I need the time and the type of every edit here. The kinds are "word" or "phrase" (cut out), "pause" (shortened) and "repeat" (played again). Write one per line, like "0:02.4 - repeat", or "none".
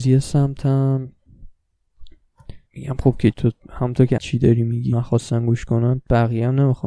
0:02.7 - pause
0:03.3 - word
0:04.2 - phrase
0:04.9 - word